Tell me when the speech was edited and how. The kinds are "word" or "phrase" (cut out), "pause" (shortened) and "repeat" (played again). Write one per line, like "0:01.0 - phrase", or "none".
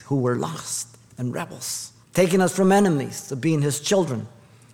0:02.0 - pause